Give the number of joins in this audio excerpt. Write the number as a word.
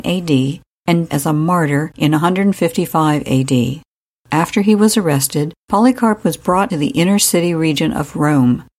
two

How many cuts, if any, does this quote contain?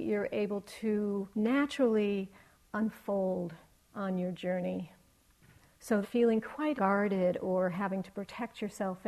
three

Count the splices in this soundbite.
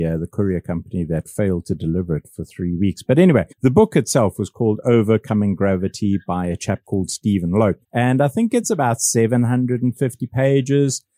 two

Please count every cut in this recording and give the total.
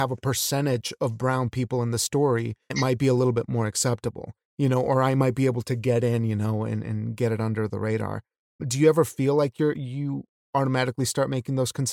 three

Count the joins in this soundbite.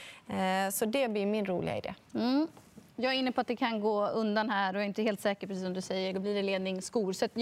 one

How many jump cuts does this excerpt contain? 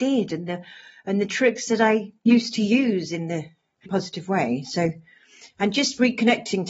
one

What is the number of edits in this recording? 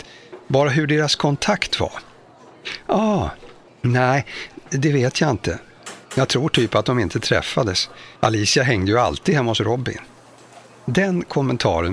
four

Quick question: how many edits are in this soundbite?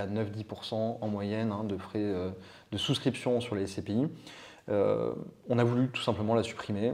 zero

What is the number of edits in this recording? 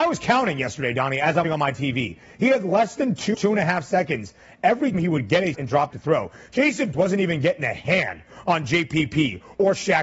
six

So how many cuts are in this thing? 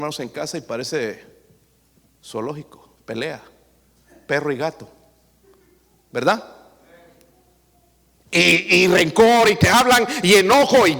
one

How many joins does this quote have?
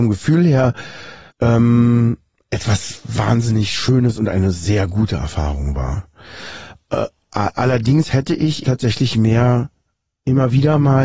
two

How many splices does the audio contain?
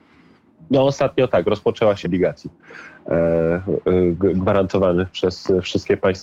one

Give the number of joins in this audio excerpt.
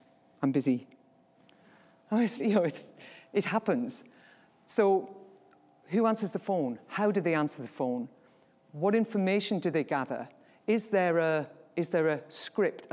one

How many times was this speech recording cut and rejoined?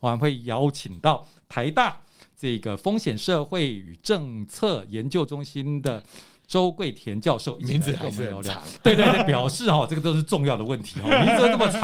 one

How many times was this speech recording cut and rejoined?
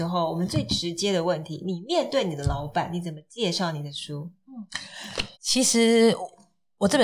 one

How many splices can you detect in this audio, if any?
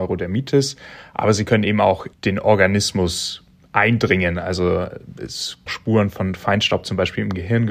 two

